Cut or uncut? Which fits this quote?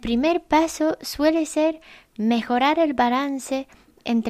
uncut